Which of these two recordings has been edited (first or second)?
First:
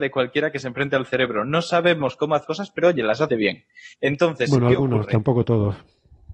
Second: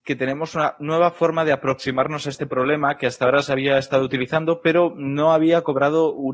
first